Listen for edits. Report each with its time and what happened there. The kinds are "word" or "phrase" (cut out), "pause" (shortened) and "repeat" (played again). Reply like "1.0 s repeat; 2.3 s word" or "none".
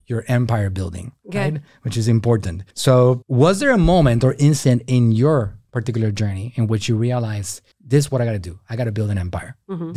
2.7 s pause; 7.7 s pause